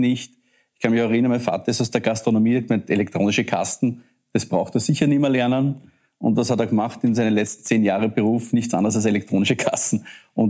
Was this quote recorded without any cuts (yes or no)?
yes